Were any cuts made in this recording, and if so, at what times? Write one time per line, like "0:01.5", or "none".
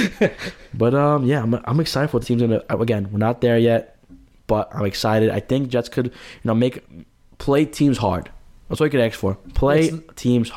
0:02.2